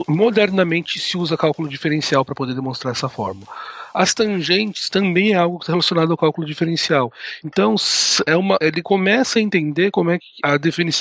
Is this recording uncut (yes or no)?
yes